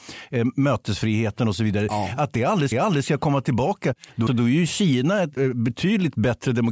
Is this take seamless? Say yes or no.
no